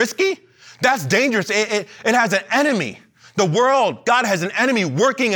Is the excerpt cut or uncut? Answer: uncut